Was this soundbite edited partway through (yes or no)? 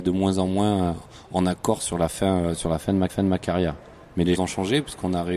yes